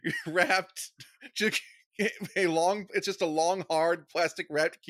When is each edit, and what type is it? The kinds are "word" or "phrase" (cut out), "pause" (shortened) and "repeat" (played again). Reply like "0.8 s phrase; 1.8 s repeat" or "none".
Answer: none

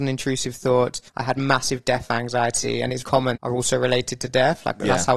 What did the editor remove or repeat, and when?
1.1 s pause; 3.0 s word; 3.4 s phrase

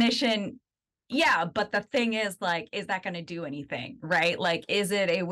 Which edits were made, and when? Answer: none

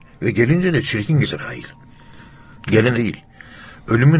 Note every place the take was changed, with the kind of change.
1.2 s word; 2.9 s word

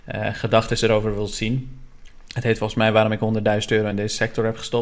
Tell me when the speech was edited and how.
none

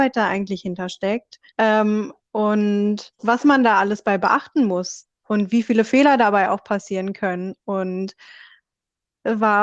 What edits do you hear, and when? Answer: 1.5 s pause; 3.2 s pause

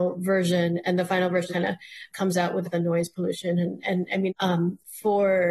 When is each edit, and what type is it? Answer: 1.5 s word; 2.1 s word; 2.6 s phrase; 4.3 s phrase

